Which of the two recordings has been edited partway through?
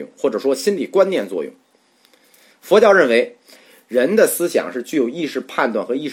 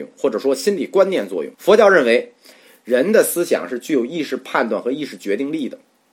second; 1 cut; at 1.5 s

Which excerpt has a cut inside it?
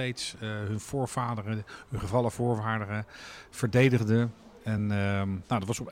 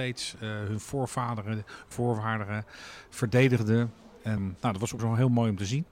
second; 3 cuts; at 1.9 s, 4.4 s, 5.0 s

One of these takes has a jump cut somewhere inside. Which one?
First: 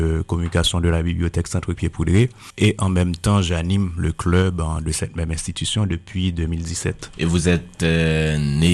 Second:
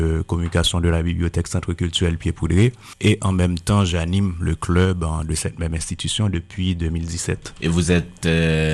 first; 1 cut; at 1.8 s

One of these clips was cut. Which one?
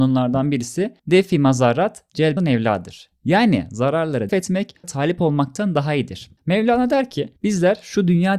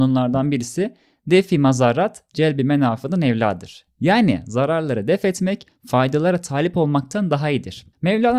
first; 5 cuts; at 1.0 s, 2.4 s, 4.3 s, 4.8 s, 7.4 s

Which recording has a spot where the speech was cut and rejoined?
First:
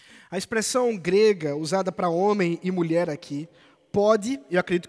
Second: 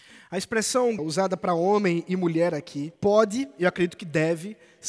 second; 2 cuts; at 1.0 s, 3.0 s

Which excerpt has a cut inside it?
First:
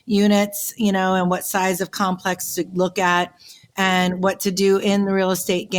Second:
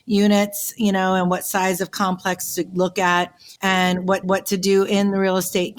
second; 2 cuts; at 3.6 s, 4.2 s

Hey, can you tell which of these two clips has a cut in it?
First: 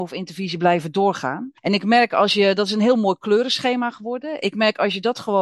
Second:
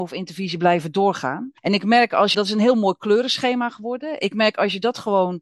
second; 1 cut; at 2.3 s

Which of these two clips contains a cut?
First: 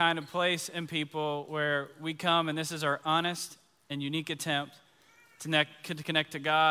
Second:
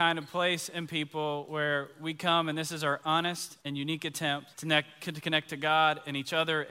second; 2 cuts; at 3.6 s, 4.5 s

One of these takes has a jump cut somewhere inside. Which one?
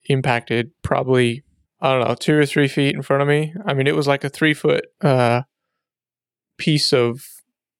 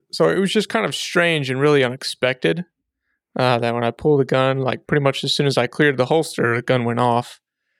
first; 2 cuts; at 1.6 s, 4.9 s

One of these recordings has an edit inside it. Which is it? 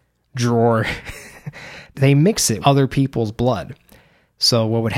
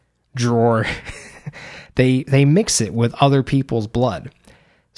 first; 2 cuts; at 1.9 s, 2.6 s

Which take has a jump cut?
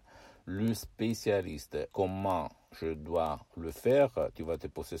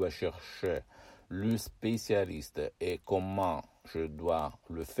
first; 1 cut; at 1.9 s

